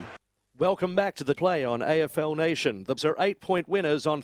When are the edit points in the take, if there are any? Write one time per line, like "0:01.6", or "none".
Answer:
0:01.3
0:03.0